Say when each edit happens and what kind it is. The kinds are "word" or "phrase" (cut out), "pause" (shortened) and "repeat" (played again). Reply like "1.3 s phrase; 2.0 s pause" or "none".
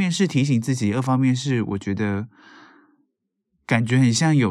none